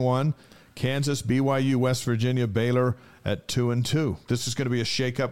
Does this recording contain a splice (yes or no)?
no